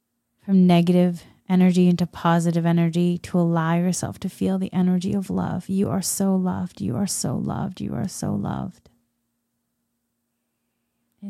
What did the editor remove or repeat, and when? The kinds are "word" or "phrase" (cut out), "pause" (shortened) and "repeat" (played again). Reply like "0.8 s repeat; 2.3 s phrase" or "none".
none